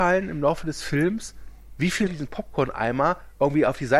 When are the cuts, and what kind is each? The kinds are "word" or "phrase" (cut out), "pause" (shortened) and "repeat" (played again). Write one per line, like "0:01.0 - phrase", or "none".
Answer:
0:02.1 - word